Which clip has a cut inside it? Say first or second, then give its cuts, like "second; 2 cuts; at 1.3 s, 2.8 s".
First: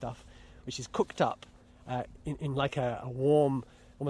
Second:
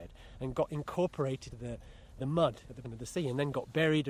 second; 3 cuts; at 1.5 s, 2.2 s, 2.8 s